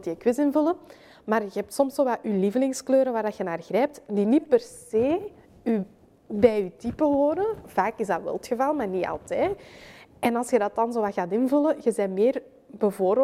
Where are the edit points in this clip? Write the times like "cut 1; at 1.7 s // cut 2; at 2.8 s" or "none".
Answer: none